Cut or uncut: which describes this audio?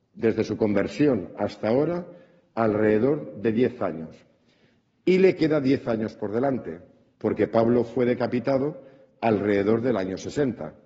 uncut